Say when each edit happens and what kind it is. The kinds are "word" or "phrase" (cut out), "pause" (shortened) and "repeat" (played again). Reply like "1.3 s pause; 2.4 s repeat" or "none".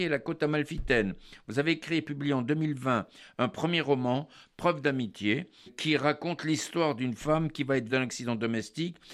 5.7 s word; 7.9 s word